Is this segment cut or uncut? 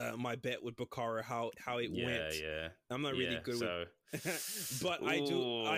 uncut